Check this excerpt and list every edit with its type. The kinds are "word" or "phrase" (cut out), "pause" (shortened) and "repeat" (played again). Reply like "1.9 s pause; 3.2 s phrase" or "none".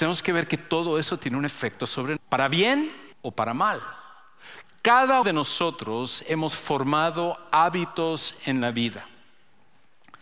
2.2 s word; 3.1 s pause; 5.2 s word